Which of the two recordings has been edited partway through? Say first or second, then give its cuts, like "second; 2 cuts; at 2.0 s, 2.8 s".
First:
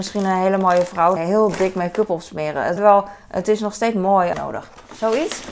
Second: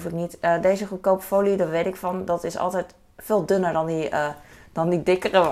first; 3 cuts; at 1.2 s, 2.8 s, 4.3 s